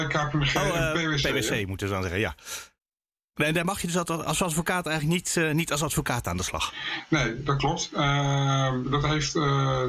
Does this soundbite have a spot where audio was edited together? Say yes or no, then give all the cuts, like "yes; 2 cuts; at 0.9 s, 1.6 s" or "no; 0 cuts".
no; 0 cuts